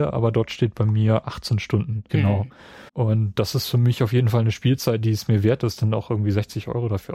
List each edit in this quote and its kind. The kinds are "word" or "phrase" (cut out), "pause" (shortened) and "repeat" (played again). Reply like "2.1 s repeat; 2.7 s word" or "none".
2.1 s word; 2.9 s pause

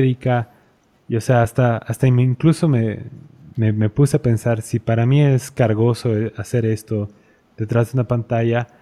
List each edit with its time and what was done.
none

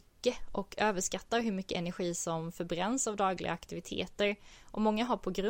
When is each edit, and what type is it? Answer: none

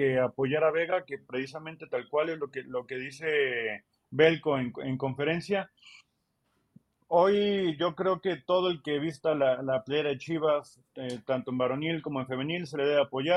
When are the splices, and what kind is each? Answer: none

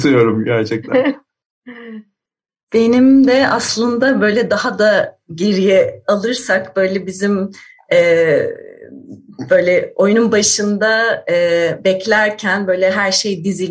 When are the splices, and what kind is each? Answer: none

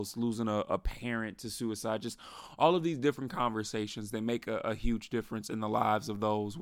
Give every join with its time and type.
none

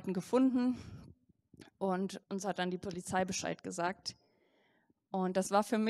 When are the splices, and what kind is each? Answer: 2.2 s pause

